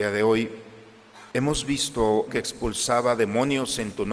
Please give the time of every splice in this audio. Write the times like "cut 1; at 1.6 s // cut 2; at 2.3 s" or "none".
cut 1; at 1.3 s // cut 2; at 2.3 s